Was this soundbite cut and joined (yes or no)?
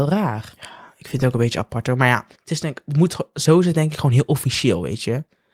yes